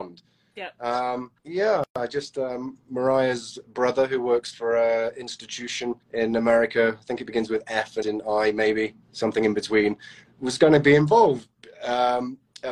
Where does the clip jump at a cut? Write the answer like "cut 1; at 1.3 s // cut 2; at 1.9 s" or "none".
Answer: cut 1; at 1.4 s // cut 2; at 6.0 s // cut 3; at 8.0 s // cut 4; at 9.0 s